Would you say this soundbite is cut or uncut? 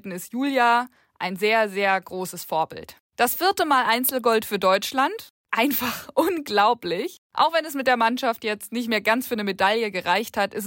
uncut